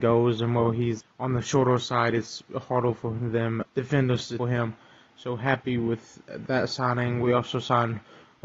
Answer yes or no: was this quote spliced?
yes